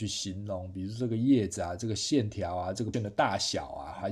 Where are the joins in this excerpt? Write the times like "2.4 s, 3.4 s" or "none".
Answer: 2.9 s